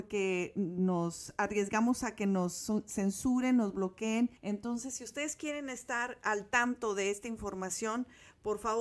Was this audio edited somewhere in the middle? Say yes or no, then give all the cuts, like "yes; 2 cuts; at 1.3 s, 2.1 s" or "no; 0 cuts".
yes; 1 cut; at 4.4 s